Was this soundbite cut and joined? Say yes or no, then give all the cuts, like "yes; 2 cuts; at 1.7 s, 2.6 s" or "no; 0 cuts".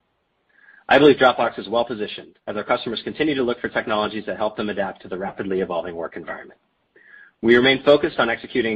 yes; 1 cut; at 2.4 s